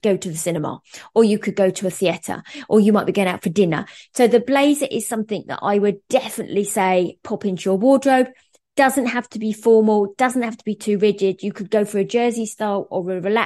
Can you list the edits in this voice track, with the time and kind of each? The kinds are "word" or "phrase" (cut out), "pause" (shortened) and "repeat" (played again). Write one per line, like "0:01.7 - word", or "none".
none